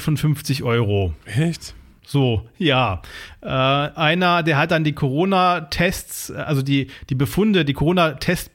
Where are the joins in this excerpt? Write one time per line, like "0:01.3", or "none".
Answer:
0:01.2